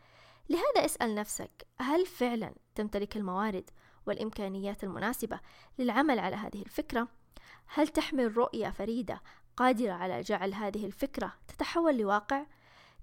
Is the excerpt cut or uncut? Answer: uncut